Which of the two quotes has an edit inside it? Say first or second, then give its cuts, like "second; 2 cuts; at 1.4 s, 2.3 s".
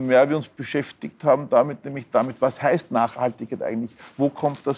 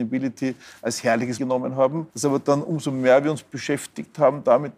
second; 2 cuts; at 1.4 s, 2.1 s